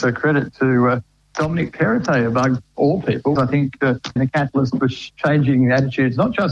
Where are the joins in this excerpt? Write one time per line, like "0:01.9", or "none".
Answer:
0:03.4
0:04.2